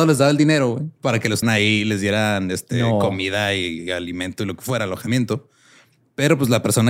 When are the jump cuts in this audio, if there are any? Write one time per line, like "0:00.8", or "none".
0:01.0
0:01.4